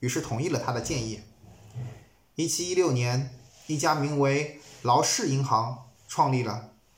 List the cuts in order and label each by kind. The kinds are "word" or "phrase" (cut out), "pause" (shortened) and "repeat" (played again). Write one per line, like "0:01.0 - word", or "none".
0:06.0 - pause

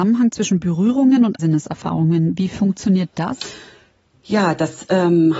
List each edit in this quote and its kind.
0:01.4 - word

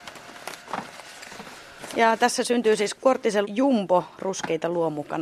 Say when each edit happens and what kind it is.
0:02.9 - word
0:03.4 - word

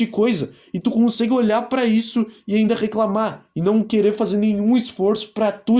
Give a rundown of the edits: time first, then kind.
none

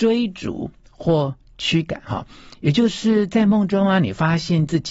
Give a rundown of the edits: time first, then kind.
none

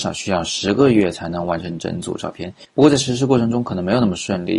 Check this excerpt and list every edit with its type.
0:02.7 - pause

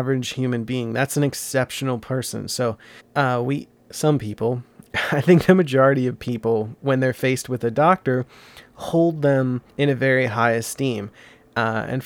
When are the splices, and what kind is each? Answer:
0:03.0 - pause
0:03.8 - pause
0:09.7 - pause

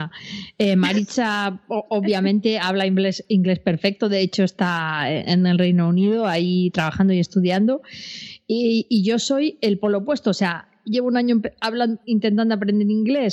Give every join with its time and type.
0:12.0 - word

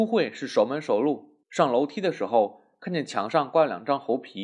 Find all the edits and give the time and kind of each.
0:01.4 - pause

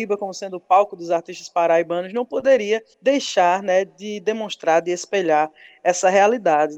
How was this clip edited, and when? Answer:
0:02.9 - pause

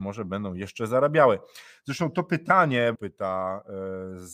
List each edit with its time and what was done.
0:02.9 - phrase

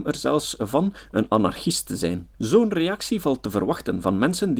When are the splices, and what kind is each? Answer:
0:02.3 - pause

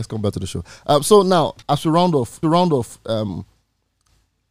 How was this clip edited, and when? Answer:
0:01.6 - pause
0:02.4 - repeat

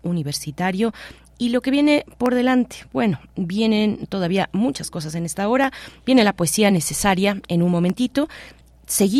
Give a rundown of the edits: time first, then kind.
none

